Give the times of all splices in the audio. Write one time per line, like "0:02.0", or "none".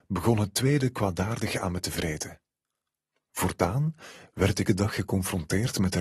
0:04.7